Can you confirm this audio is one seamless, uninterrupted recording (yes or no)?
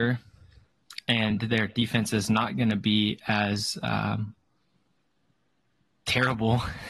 yes